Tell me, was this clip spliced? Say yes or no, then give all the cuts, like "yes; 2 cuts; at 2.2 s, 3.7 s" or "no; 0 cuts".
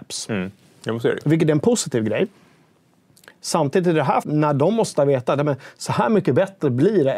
yes; 1 cut; at 4.2 s